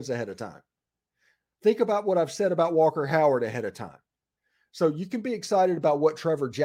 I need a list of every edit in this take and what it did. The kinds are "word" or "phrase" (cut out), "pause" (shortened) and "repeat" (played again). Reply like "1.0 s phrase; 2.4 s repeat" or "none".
none

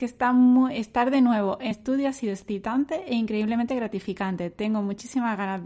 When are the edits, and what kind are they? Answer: 1.7 s word

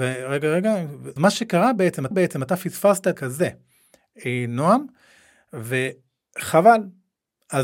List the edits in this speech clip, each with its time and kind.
1.2 s word; 2.1 s repeat; 3.2 s word

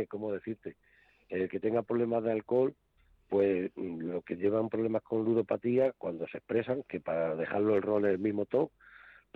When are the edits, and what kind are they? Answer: none

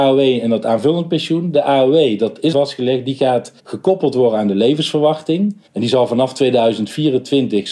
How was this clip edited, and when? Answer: 2.5 s phrase; 3.6 s pause; 5.7 s pause

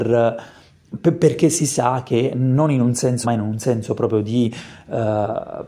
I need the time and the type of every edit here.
3.2 s word

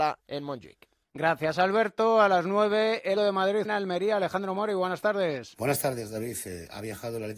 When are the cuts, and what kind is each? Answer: 3.2 s word; 3.6 s word

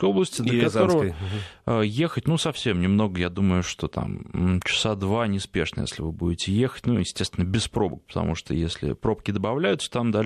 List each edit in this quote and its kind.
none

